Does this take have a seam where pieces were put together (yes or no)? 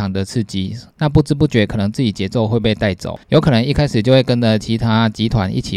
yes